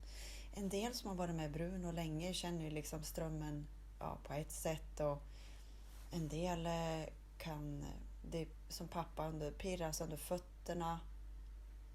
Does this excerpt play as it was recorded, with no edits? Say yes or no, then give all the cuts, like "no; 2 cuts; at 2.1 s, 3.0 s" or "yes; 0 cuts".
yes; 0 cuts